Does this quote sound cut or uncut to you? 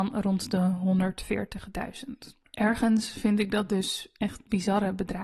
cut